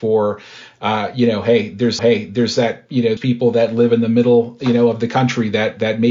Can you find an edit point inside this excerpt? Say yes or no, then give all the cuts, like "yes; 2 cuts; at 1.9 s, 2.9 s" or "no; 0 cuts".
yes; 2 cuts; at 2.0 s, 3.2 s